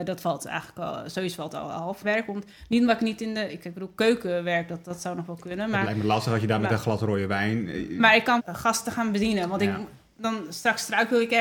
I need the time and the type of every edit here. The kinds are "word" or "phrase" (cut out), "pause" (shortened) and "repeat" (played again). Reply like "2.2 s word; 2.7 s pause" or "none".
2.0 s word; 4.8 s word; 8.4 s word